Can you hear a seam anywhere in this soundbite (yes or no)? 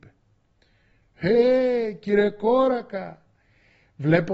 no